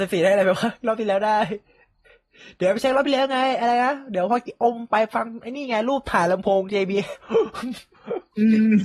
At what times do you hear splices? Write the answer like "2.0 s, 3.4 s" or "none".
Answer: none